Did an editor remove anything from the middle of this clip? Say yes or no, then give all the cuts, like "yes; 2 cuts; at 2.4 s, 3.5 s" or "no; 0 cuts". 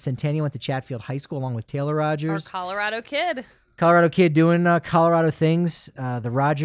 no; 0 cuts